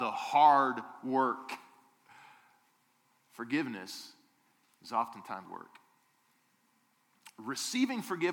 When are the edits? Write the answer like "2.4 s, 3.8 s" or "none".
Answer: 5.4 s